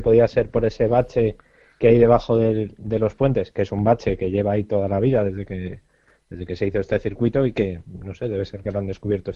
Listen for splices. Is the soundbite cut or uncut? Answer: uncut